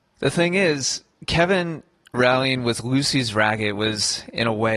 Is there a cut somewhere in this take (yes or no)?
no